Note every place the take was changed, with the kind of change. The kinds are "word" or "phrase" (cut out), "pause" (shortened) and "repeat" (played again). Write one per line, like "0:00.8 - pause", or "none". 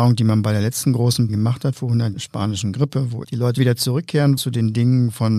0:01.3 - word
0:02.1 - word
0:03.2 - word
0:03.6 - word
0:04.4 - word